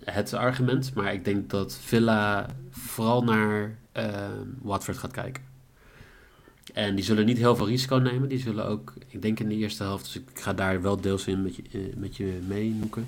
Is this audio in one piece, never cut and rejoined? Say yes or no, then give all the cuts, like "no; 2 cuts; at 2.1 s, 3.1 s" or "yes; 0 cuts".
no; 1 cut; at 3.9 s